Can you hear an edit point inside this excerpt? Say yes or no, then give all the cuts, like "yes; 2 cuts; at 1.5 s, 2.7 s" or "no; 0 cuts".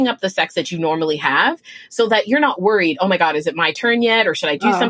no; 0 cuts